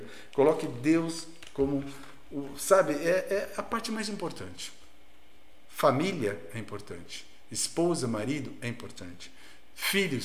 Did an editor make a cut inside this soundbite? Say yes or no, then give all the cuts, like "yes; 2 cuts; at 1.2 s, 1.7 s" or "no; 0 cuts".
no; 0 cuts